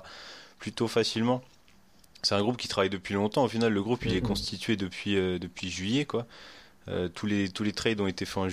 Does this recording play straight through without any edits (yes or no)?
yes